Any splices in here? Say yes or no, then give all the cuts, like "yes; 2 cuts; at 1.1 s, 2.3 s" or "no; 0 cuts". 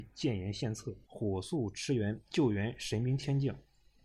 yes; 2 cuts; at 1.0 s, 2.3 s